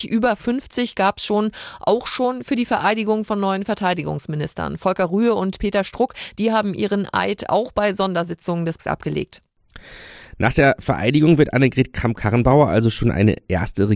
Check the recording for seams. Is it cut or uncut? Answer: cut